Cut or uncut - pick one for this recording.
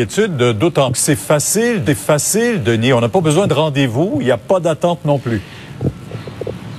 cut